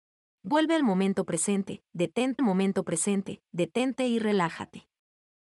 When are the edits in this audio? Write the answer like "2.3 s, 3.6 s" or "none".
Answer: 2.4 s